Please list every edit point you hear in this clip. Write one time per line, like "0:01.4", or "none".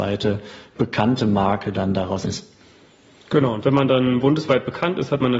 0:02.2